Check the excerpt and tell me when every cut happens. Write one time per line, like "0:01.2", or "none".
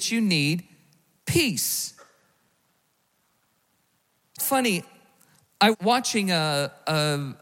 0:04.4
0:05.7

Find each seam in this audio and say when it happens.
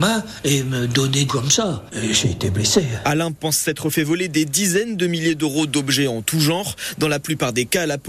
0:01.3

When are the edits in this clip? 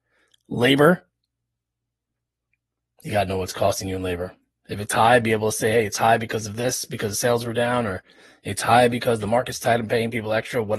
none

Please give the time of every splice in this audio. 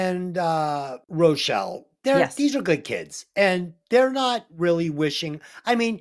0:01.0

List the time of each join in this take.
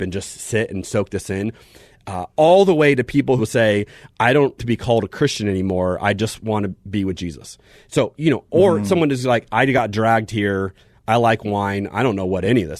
0:03.4
0:04.6
0:08.1

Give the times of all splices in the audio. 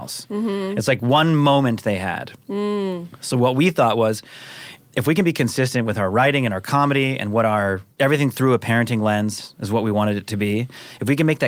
0:07.9

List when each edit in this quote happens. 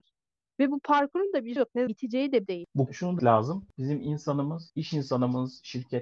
0:01.6
0:01.9
0:02.5
0:02.9
0:03.2
0:04.7

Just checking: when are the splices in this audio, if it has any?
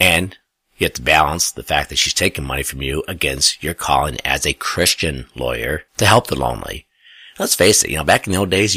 0:05.9

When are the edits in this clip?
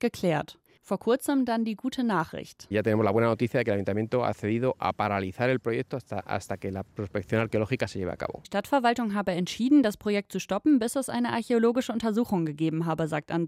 0:08.4

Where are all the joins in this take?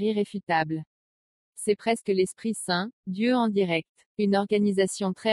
0:04.1

